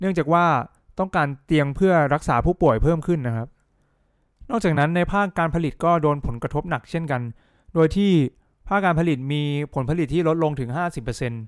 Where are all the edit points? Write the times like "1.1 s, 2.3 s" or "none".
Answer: none

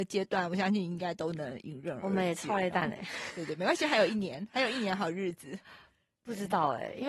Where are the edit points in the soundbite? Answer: none

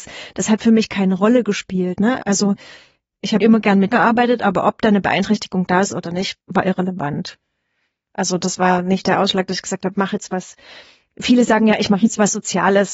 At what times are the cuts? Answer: 3.4 s, 3.9 s, 9.9 s

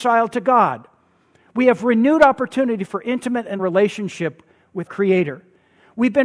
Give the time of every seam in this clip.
3.6 s, 4.9 s

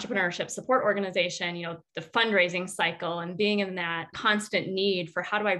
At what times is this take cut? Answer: 1.9 s, 4.1 s

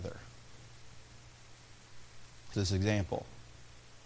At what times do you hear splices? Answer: 2.5 s

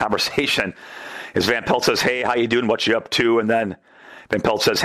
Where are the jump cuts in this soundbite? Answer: none

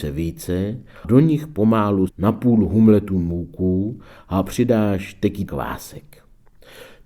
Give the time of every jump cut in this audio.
1.0 s, 2.1 s, 5.5 s

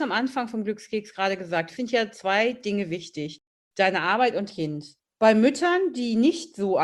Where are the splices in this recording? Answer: 1.8 s, 4.5 s

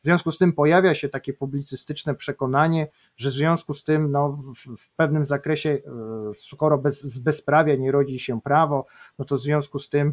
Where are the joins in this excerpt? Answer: none

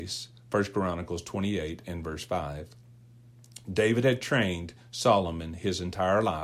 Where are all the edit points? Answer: none

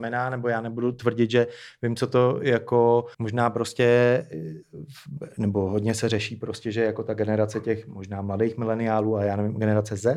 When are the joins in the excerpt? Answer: 3.1 s, 4.6 s

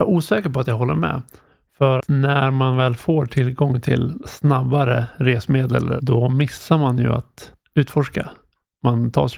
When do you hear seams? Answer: 2.0 s

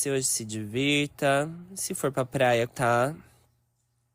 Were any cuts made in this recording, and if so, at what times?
2.7 s

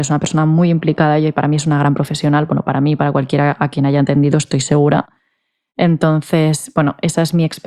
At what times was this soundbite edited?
none

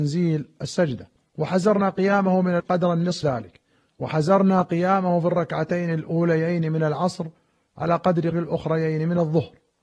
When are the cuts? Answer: 1.2 s, 2.6 s, 3.2 s, 8.3 s

